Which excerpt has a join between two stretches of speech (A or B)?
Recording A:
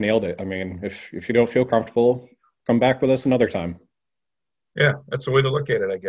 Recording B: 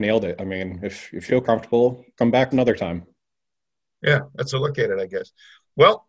B